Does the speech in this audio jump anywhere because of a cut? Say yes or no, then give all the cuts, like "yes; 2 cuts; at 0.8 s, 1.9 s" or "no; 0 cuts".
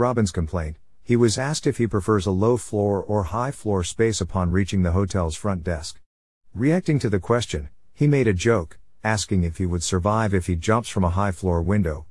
no; 0 cuts